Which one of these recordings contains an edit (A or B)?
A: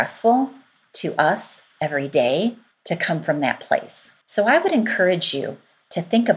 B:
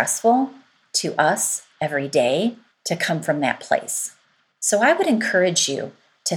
A